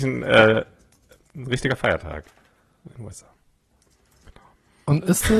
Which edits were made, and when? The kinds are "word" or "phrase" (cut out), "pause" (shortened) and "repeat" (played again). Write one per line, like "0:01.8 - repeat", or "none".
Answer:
none